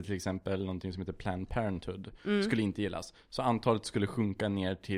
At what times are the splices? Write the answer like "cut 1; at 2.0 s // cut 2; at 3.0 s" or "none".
none